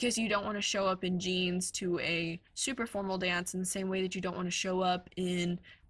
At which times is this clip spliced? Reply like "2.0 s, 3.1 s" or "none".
2.5 s